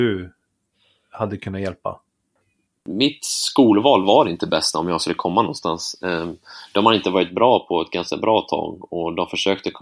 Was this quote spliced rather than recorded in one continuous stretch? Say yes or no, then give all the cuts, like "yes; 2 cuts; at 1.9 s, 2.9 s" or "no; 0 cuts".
no; 0 cuts